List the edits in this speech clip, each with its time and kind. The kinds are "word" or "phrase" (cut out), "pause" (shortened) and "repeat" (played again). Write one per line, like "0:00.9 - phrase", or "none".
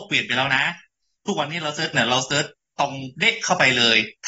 0:01.9 - word